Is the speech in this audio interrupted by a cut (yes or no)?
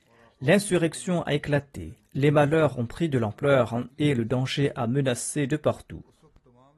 yes